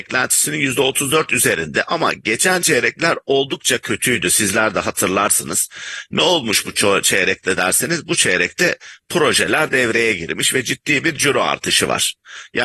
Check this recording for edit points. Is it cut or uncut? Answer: uncut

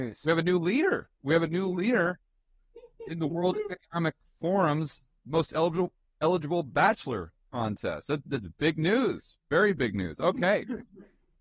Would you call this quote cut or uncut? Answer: cut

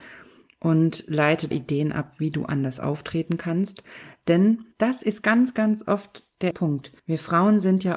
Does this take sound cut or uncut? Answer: cut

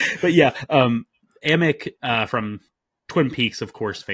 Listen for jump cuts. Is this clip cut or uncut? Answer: cut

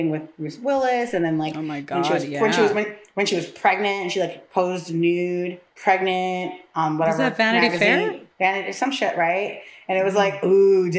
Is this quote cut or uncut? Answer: cut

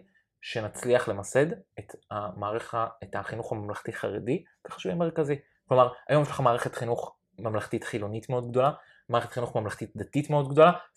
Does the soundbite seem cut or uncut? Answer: uncut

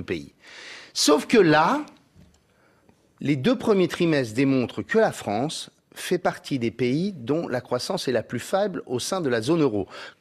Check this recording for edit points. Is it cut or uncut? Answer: uncut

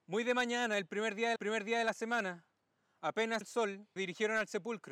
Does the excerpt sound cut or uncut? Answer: cut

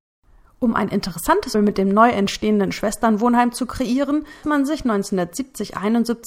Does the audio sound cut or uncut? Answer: cut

